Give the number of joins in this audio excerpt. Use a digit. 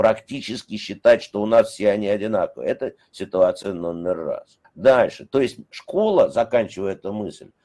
1